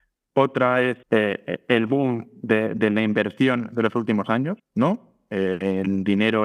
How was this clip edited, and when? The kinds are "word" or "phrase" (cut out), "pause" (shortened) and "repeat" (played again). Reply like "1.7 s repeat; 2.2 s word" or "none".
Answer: 1.0 s pause; 4.6 s pause